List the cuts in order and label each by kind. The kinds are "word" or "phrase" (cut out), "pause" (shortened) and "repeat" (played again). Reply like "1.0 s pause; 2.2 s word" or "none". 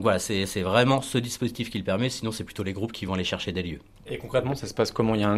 none